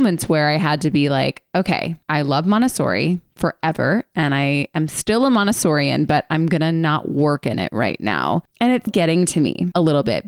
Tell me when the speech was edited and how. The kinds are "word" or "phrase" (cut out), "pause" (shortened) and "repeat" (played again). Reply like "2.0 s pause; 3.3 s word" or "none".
2.0 s pause; 8.9 s word